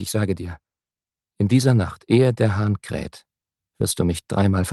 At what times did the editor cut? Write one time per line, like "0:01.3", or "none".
0:03.6